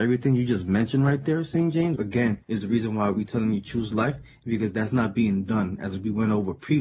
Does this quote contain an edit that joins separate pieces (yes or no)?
yes